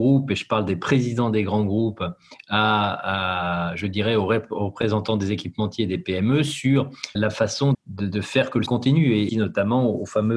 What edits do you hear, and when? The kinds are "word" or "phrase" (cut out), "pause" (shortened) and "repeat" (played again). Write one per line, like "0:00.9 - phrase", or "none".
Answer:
0:07.1 - word
0:07.7 - word
0:08.7 - word
0:09.3 - phrase